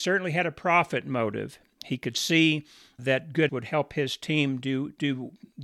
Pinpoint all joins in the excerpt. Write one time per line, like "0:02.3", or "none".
0:03.5